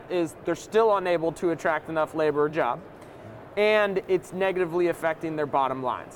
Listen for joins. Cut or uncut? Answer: cut